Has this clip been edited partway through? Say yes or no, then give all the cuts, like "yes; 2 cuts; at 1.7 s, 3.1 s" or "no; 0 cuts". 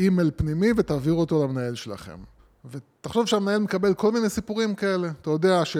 yes; 1 cut; at 2.4 s